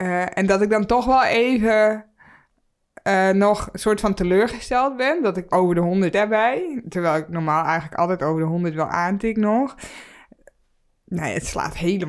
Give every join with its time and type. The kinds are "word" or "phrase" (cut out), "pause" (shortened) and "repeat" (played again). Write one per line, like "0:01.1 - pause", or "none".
0:05.5 - word
0:06.1 - word